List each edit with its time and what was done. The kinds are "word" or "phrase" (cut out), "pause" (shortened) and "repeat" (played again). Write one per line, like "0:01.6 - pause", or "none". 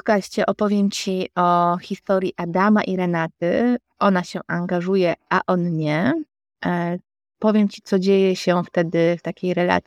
none

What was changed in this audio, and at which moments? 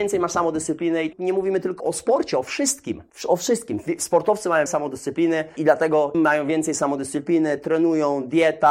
0:01.1 - word
0:01.8 - word
0:04.7 - word
0:05.6 - word
0:06.1 - word

